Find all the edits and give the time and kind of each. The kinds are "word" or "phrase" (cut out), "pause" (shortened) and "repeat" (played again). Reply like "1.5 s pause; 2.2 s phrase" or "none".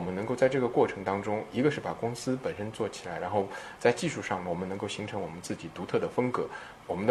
none